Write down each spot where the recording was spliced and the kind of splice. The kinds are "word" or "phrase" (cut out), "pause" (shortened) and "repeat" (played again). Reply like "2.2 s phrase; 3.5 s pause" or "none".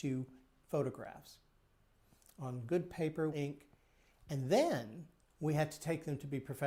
3.3 s phrase